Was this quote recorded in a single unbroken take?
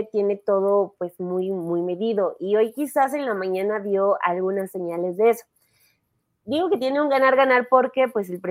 yes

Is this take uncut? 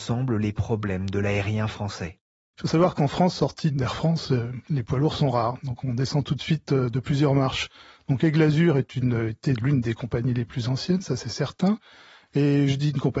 yes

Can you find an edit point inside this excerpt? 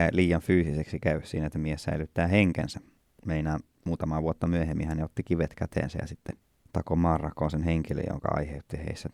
no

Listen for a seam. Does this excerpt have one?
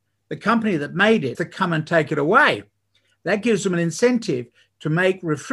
yes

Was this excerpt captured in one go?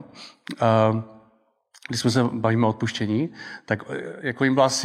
yes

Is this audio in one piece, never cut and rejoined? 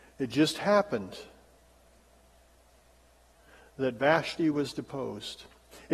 yes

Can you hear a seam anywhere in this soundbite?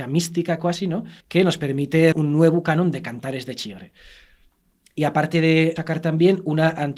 yes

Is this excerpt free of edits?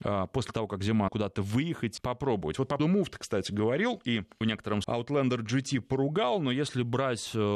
no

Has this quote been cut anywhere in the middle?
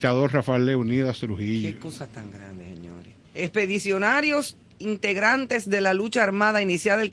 yes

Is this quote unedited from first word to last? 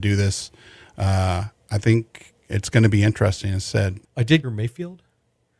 no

